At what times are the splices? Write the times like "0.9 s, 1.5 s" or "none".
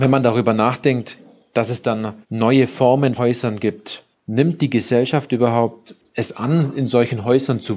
2.2 s, 3.1 s